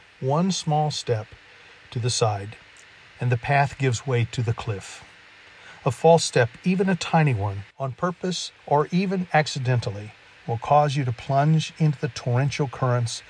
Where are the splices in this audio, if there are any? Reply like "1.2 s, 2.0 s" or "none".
7.7 s, 8.6 s